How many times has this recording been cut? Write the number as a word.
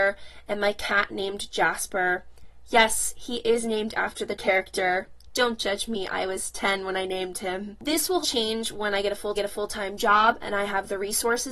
three